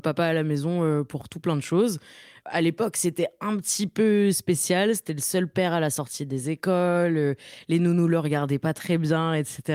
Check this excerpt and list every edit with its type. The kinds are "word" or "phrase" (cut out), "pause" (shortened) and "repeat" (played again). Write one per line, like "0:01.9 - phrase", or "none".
none